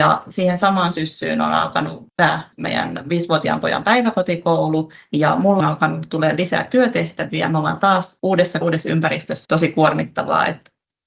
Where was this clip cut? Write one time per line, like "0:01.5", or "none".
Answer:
0:05.6
0:08.6
0:09.4